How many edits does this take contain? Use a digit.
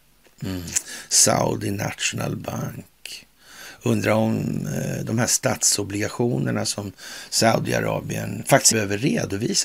1